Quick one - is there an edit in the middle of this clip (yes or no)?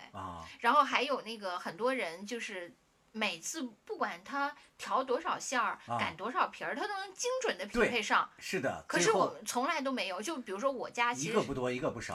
no